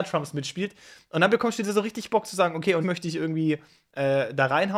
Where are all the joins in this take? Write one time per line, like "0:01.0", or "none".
0:02.8